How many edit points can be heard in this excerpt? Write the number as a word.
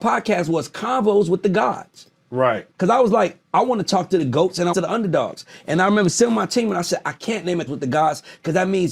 three